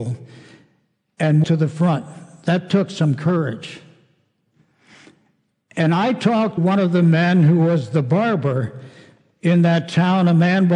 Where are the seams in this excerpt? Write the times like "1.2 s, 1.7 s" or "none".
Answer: 1.4 s, 6.6 s